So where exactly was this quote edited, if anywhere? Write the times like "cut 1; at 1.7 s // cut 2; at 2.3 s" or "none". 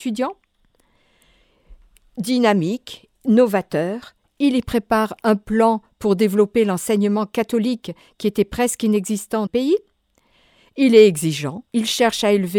cut 1; at 3.2 s // cut 2; at 9.5 s // cut 3; at 11.7 s